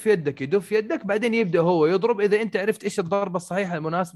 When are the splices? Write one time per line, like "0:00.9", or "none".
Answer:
none